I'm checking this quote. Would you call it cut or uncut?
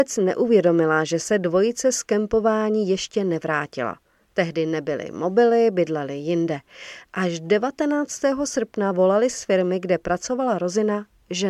uncut